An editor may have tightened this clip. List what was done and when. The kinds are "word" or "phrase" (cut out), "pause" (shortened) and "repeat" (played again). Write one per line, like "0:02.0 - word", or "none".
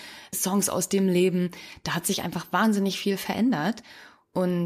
none

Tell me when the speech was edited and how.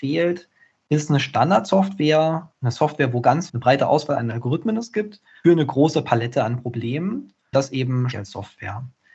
0:02.5 - word
0:03.5 - word
0:05.4 - word
0:07.5 - word
0:08.1 - word

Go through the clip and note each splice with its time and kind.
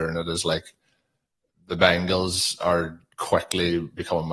none

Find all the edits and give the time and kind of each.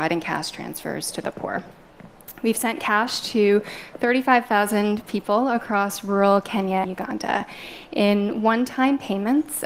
0:06.8 - word

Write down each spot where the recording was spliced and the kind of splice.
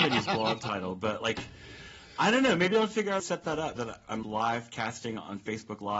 0:03.2 - phrase
0:03.8 - word
0:04.2 - word

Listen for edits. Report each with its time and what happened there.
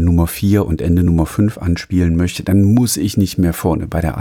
none

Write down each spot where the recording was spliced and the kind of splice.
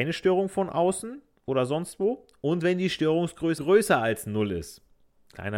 0:03.6 - word

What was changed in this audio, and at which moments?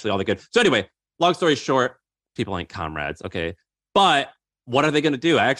0:02.4 - word

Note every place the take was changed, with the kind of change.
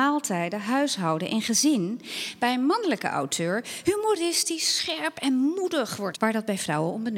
0:06.1 - word

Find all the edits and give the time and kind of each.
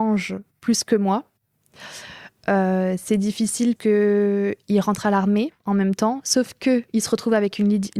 0:03.8 - word
0:05.6 - pause
0:06.9 - pause

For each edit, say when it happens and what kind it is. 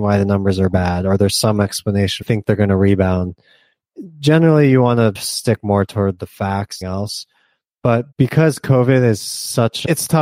0:02.2 - phrase
0:06.8 - phrase
0:08.1 - pause

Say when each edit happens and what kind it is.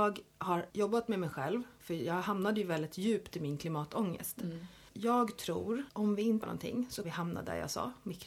0:06.4 - word
0:07.0 - word

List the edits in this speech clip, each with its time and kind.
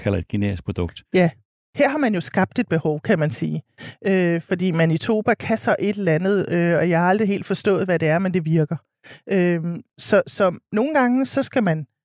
none

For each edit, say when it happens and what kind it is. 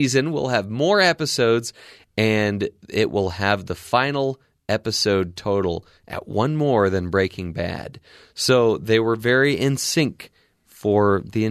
none

